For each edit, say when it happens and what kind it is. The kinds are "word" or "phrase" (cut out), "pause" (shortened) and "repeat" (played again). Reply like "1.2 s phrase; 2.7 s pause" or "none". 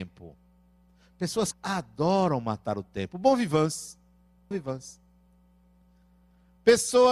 1.5 s word; 4.5 s word